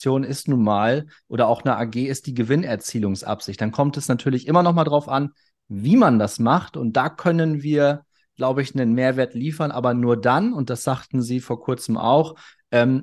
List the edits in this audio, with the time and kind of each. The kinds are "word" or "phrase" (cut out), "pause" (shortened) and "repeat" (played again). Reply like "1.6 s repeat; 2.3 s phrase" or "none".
none